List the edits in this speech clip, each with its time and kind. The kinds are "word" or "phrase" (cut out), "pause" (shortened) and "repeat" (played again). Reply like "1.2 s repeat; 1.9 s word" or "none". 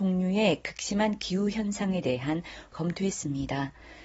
2.7 s phrase

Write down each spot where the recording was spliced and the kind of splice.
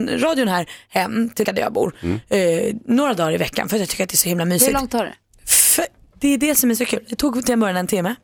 1.4 s word; 4.9 s word

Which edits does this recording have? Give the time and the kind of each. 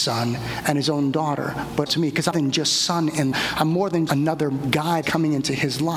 1.9 s word; 2.3 s word; 3.3 s word; 4.1 s word; 5.0 s word

